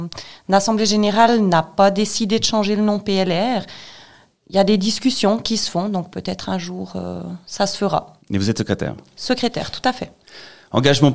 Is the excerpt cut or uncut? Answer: uncut